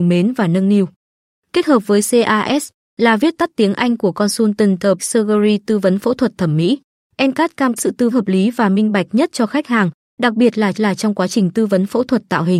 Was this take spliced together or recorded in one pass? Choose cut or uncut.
cut